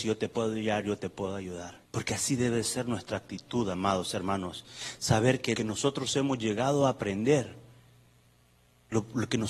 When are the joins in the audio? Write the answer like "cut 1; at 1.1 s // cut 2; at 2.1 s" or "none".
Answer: cut 1; at 1.8 s // cut 2; at 5.6 s